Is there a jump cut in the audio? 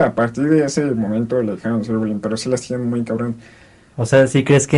no; 0 cuts

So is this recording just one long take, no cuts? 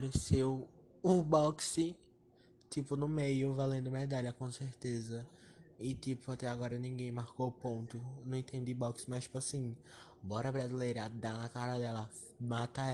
yes; 0 cuts

